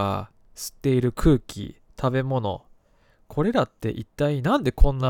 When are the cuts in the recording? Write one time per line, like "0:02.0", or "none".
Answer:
none

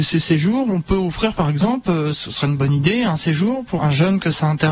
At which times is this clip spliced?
0:03.8

